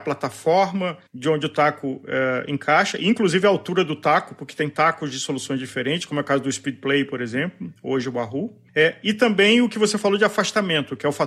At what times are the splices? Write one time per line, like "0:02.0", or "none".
0:01.1